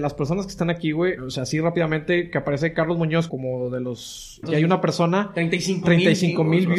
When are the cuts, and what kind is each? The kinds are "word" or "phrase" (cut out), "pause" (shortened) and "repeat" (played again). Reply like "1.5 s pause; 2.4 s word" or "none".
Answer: 1.2 s word; 3.3 s word; 4.4 s word